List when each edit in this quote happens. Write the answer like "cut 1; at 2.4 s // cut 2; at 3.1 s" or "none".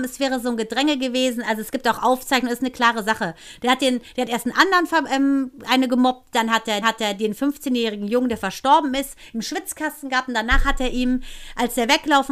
cut 1; at 6.8 s